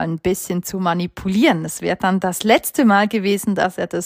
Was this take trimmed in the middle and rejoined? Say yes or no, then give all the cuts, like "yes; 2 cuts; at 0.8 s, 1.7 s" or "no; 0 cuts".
no; 0 cuts